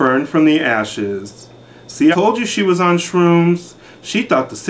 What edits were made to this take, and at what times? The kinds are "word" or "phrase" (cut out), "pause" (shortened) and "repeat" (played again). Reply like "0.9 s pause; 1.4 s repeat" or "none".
2.1 s word